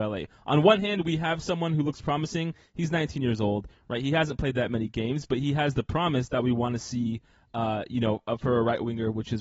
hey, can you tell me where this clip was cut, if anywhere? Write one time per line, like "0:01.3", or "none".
none